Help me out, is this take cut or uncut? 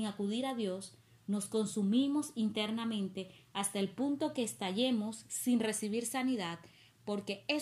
uncut